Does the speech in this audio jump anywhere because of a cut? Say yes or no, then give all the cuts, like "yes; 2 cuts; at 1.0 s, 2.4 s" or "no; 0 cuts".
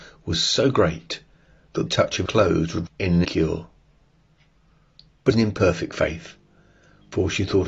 yes; 5 cuts; at 1.9 s, 2.3 s, 2.9 s, 3.2 s, 5.3 s